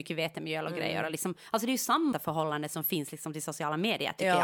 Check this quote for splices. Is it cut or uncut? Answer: cut